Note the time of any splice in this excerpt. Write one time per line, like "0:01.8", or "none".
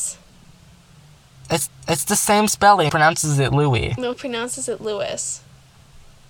0:01.7
0:02.9
0:04.1